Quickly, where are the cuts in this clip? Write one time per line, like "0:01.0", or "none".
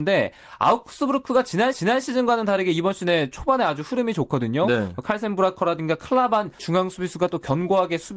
0:01.7
0:06.6